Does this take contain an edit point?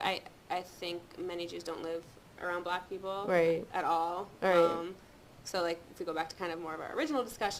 no; 0 cuts

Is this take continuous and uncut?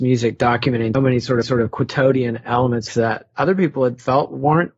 no; 3 cuts; at 0.9 s, 1.4 s, 2.9 s

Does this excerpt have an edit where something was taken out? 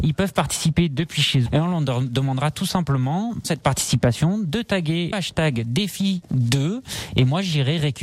yes; 4 cuts; at 1.5 s, 3.4 s, 5.1 s, 6.2 s

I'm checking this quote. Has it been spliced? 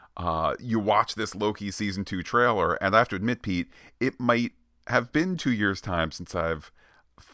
no; 0 cuts

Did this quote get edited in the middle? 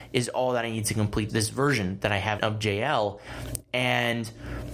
yes; 2 cuts; at 1.3 s, 2.4 s

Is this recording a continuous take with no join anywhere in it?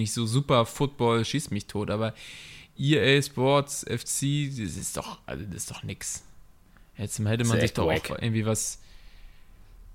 yes; 0 cuts

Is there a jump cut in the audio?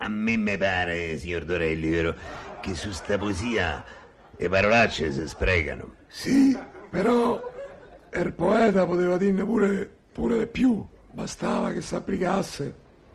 no; 0 cuts

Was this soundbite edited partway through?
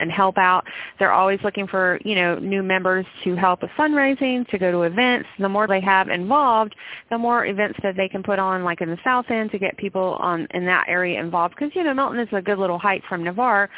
yes; 2 cuts; at 4.5 s, 5.7 s

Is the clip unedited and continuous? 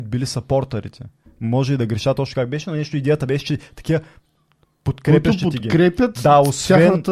yes; 0 cuts

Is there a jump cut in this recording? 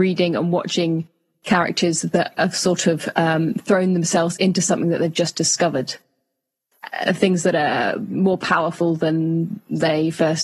no; 0 cuts

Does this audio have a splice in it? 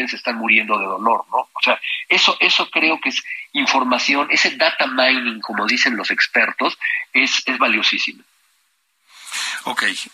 no; 0 cuts

